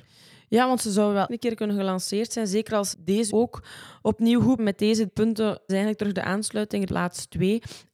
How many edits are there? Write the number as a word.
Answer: seven